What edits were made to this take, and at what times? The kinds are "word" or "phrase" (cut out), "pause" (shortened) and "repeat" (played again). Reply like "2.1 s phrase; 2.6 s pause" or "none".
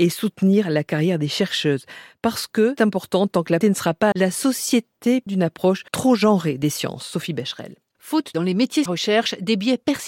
2.8 s word; 3.6 s word; 4.1 s word; 5.3 s word; 5.9 s pause; 8.3 s phrase; 8.9 s phrase